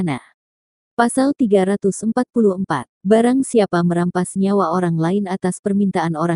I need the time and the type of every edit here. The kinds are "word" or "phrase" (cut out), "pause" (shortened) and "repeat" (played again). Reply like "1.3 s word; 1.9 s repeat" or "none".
2.9 s pause